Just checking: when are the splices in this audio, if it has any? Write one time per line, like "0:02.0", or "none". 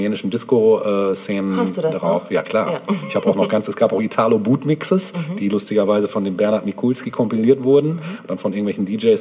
none